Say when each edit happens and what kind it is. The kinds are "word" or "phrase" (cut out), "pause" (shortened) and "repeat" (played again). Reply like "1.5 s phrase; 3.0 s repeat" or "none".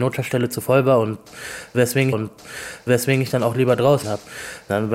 2.1 s repeat; 4.0 s word